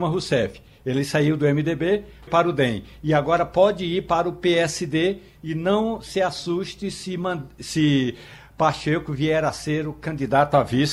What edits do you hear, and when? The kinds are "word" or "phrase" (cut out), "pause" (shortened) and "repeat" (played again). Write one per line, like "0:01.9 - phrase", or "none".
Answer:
0:02.3 - word

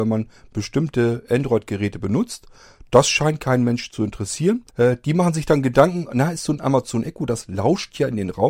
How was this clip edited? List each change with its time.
0:04.7 - pause

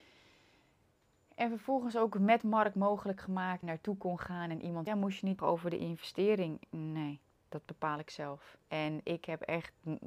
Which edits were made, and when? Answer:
0:03.6 - phrase
0:04.9 - phrase
0:05.4 - word
0:07.3 - pause
0:08.6 - pause

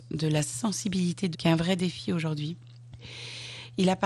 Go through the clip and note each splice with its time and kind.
0:01.3 - word

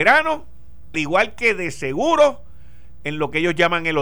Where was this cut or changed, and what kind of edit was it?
0:00.9 - word

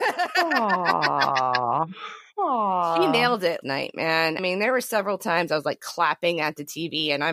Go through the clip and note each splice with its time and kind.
0:03.6 - word
0:04.4 - word

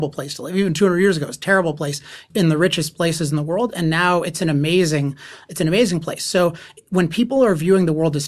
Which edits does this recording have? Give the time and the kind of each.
0:02.3 - word

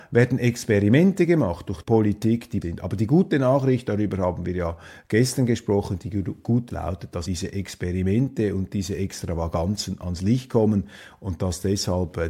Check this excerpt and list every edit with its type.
0:01.8 - word
0:02.6 - word
0:06.7 - word
0:07.3 - word

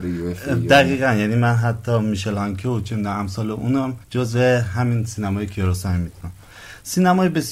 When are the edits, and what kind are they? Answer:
0:04.0 - pause

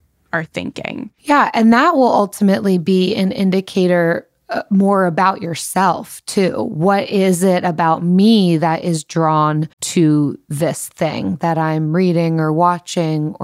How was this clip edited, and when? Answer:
0:01.2 - pause
0:09.7 - pause

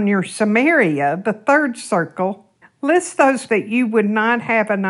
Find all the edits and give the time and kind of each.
0:02.6 - pause
0:03.5 - word

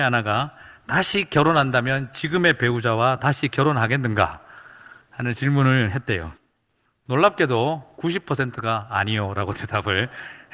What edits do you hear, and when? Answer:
none

